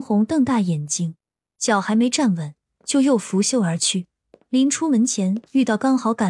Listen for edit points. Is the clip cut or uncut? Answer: uncut